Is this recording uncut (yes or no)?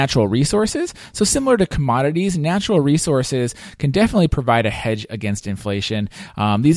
yes